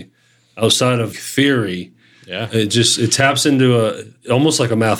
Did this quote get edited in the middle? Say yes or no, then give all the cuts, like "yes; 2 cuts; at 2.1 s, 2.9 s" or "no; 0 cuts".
yes; 1 cut; at 1.1 s